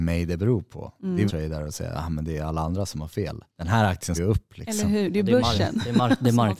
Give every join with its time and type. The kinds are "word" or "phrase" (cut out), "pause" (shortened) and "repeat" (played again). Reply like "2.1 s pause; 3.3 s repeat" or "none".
1.3 s phrase; 3.5 s pause; 4.2 s word